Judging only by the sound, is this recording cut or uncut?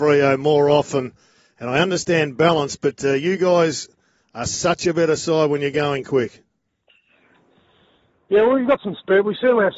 uncut